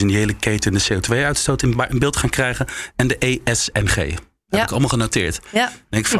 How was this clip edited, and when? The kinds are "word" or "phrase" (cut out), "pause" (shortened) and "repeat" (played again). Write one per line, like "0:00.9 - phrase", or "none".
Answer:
none